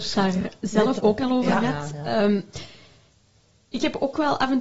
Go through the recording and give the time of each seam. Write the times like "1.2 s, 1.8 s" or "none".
1.0 s